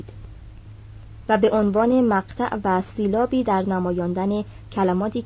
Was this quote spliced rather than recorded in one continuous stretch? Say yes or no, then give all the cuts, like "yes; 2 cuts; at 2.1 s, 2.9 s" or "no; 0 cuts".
no; 0 cuts